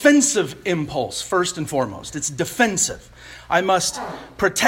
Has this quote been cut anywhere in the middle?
no; 0 cuts

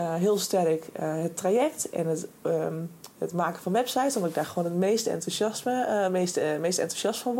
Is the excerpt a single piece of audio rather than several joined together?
yes; 0 cuts

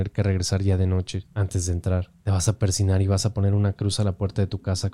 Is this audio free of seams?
no; 2 cuts; at 1.3 s, 2.2 s

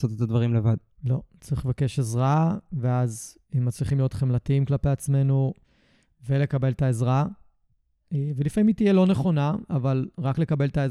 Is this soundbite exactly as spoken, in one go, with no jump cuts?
yes; 0 cuts

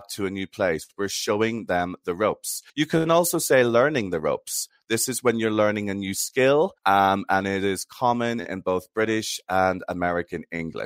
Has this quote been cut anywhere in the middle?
yes; 2 cuts; at 2.7 s, 6.8 s

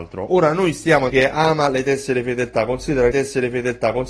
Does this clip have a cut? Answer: yes; 2 cuts; at 1.1 s, 3.1 s

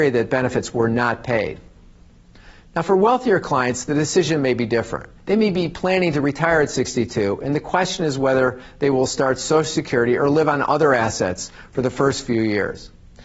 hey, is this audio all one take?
no; 1 cut; at 5.2 s

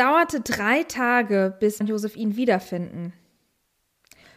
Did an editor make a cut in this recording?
yes; 1 cut; at 1.8 s

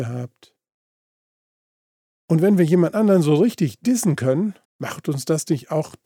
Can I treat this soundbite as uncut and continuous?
no; 1 cut; at 4.6 s

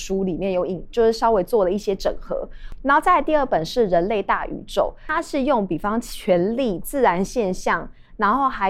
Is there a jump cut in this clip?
yes; 1 cut; at 6.8 s

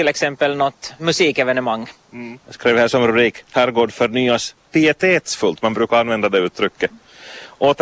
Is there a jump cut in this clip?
yes; 4 cuts; at 1.0 s, 2.4 s, 3.5 s, 4.6 s

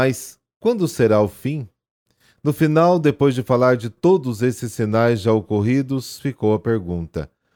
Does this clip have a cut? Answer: no; 0 cuts

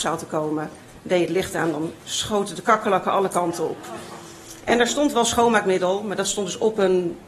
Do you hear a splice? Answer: yes; 1 cut; at 2.0 s

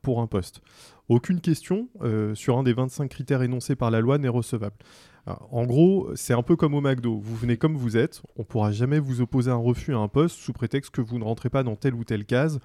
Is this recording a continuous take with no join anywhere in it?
yes; 0 cuts

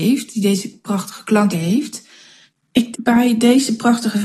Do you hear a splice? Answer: yes; 2 cuts; at 1.5 s, 2.9 s

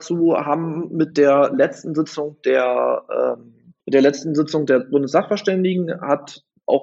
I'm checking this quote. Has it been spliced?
no; 0 cuts

